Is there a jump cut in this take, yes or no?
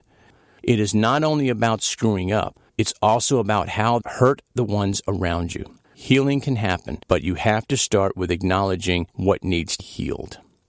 yes